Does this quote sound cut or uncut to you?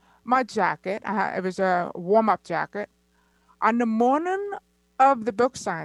uncut